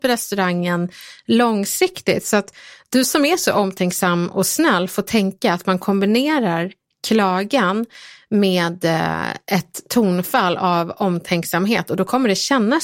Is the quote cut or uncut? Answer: uncut